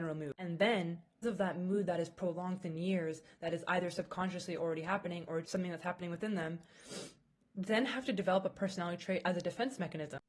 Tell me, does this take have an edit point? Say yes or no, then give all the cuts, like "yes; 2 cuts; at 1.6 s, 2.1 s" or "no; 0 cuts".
yes; 4 cuts; at 1.2 s, 2.6 s, 5.4 s, 7.4 s